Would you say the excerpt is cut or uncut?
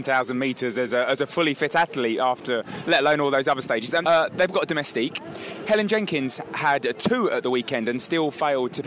cut